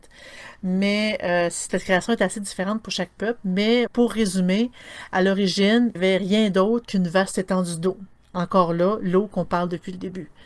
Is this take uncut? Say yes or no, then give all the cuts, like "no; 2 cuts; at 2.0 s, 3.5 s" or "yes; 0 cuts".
no; 3 cuts; at 1.7 s, 3.9 s, 5.9 s